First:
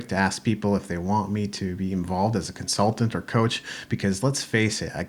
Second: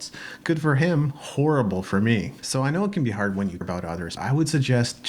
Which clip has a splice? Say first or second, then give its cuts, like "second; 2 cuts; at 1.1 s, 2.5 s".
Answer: second; 2 cuts; at 3.6 s, 4.2 s